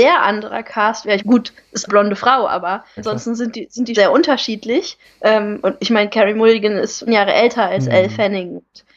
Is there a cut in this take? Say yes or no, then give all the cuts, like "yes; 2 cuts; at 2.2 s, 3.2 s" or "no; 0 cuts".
yes; 6 cuts; at 1.2 s, 1.9 s, 3.0 s, 3.9 s, 5.0 s, 7.1 s